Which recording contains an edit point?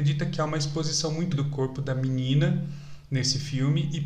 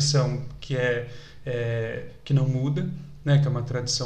first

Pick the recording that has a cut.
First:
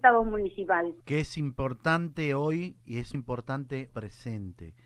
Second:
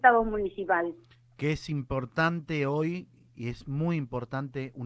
first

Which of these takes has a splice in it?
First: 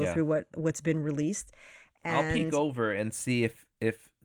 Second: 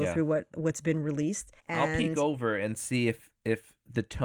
second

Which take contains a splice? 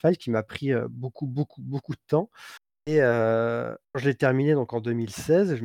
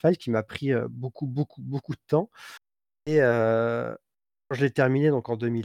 first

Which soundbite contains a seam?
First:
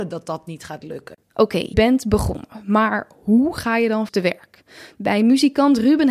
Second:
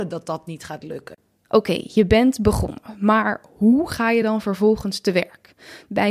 first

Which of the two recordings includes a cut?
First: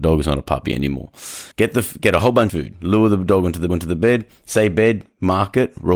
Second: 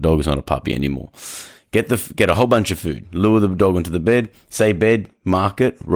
first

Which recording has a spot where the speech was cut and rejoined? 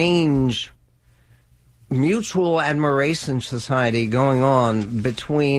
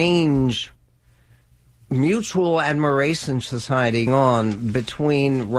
second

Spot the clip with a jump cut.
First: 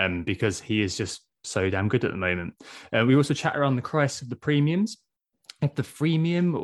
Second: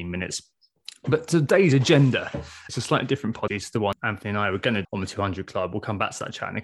second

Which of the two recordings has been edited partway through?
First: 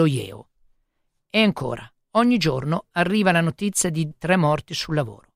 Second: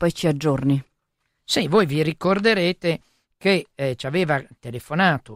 first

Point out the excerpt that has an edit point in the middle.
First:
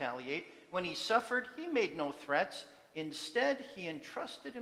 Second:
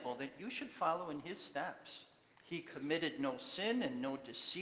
second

